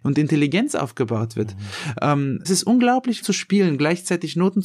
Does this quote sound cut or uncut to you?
cut